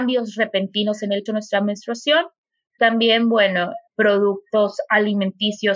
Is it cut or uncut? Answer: cut